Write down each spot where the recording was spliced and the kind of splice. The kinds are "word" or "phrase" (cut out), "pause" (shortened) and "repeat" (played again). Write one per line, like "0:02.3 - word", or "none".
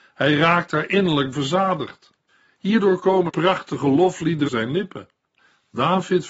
0:01.3 - word
0:03.3 - word
0:04.5 - word